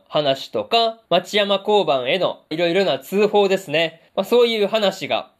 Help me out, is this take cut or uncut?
cut